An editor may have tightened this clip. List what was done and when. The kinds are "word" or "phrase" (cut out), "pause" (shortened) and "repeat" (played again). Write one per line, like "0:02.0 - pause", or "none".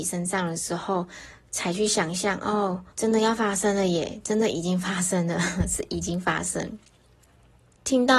0:02.9 - pause